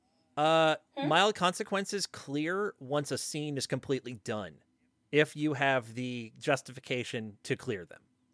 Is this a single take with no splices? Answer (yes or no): yes